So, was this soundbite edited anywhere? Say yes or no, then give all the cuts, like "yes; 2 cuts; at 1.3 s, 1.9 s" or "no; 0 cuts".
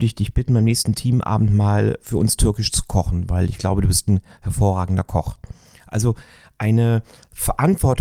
no; 0 cuts